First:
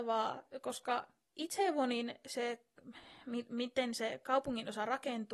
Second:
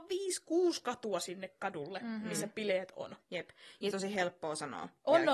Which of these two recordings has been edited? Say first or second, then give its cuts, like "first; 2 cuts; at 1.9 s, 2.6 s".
second; 1 cut; at 3.9 s